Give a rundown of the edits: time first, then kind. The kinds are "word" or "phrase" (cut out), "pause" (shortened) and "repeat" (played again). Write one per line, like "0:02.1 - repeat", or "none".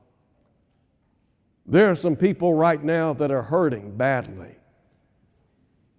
none